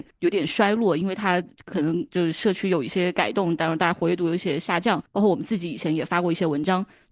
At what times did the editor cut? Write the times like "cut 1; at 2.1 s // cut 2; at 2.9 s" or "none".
cut 1; at 5.1 s